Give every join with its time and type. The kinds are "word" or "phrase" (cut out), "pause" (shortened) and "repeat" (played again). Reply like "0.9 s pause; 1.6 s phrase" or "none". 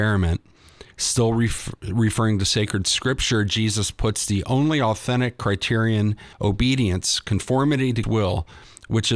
0.9 s pause; 6.3 s pause; 8.0 s word